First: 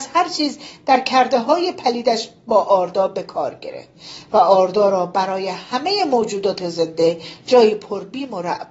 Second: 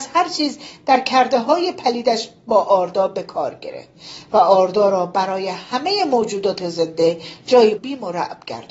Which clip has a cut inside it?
second; 1 cut; at 7.8 s

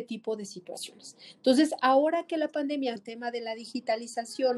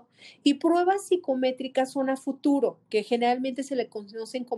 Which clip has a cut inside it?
first; 1 cut; at 3.0 s

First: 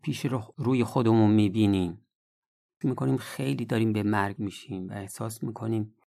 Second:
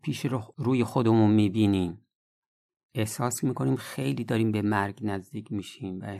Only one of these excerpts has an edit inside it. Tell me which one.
first; 2 cuts; at 2.8 s, 4.4 s

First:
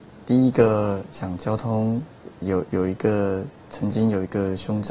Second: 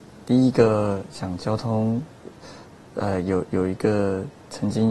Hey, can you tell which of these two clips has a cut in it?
first; 1 cut; at 2.4 s

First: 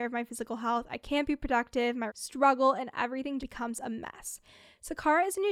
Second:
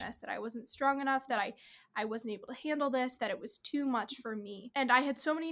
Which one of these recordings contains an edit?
first; 2 cuts; at 2.1 s, 3.4 s

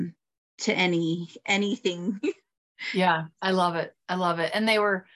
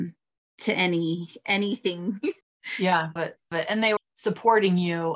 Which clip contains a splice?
second; 4 cuts; at 2.4 s, 3.2 s, 3.5 s, 4.0 s

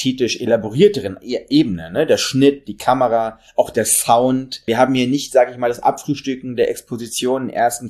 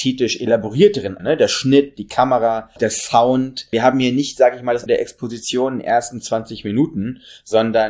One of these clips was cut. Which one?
second; 3 cuts; at 1.2 s, 2.8 s, 4.9 s

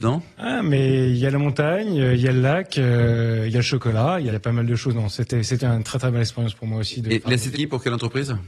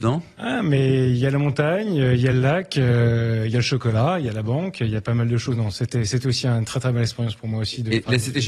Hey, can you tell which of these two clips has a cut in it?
first; 3 cuts; at 4.3 s, 5.6 s, 7.5 s

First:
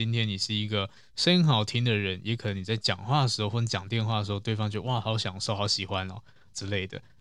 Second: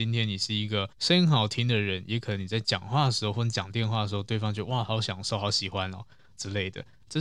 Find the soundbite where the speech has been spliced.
second; 1 cut; at 0.9 s

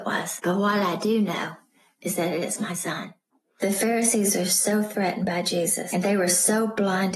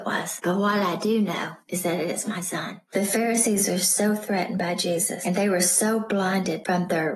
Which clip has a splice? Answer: second; 2 cuts; at 1.6 s, 2.9 s

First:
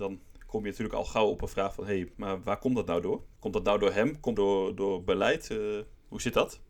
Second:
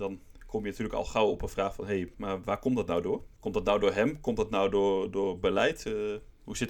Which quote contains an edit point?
first; 1 cut; at 4.3 s

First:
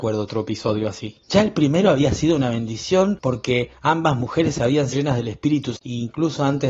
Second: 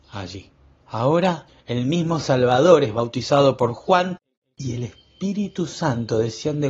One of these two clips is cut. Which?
first; 3 cuts; at 1.2 s, 4.9 s, 5.8 s

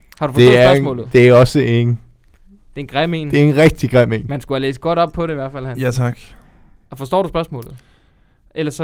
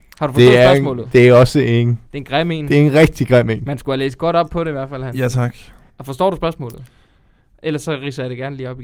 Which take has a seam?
second; 2 cuts; at 2.1 s, 5.9 s

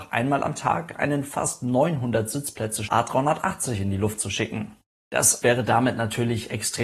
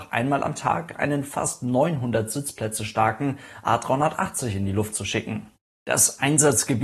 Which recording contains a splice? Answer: first; 2 cuts; at 2.9 s, 5.4 s

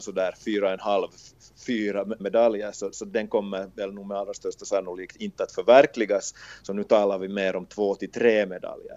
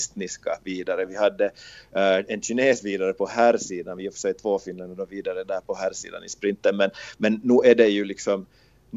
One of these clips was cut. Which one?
first; 1 cut; at 2.2 s

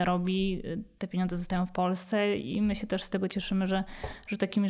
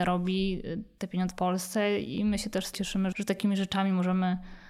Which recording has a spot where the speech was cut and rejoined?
second; 3 cuts; at 1.3 s, 2.7 s, 3.1 s

